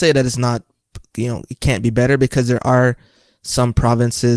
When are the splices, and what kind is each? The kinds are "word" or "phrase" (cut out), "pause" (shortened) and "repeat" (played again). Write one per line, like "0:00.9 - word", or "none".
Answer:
none